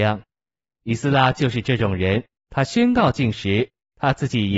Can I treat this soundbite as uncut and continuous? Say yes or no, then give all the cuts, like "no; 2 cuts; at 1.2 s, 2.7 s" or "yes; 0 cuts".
no; 1 cut; at 2.4 s